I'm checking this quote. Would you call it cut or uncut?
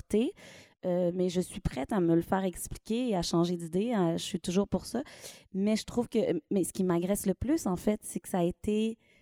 uncut